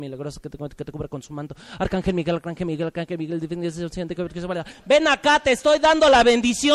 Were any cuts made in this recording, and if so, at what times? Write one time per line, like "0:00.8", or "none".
none